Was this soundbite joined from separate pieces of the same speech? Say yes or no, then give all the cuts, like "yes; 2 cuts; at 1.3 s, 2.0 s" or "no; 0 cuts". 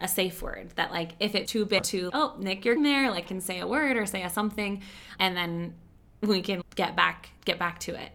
yes; 7 cuts; at 1.5 s, 1.8 s, 2.1 s, 2.8 s, 3.2 s, 5.2 s, 6.6 s